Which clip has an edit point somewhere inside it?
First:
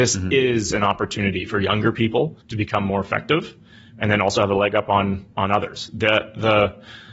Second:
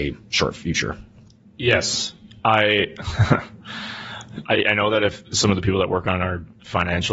first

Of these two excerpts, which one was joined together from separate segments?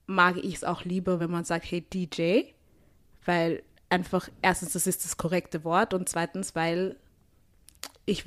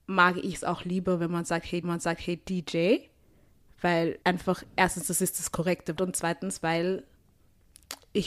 second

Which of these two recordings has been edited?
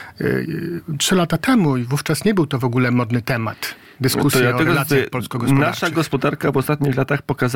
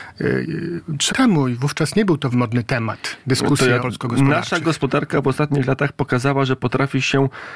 second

